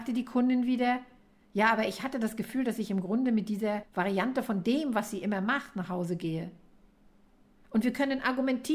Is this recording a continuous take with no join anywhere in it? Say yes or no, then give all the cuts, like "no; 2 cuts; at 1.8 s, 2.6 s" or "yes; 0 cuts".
yes; 0 cuts